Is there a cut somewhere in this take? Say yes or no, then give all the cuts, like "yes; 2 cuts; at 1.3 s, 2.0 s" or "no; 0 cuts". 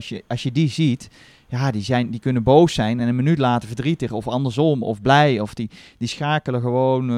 no; 0 cuts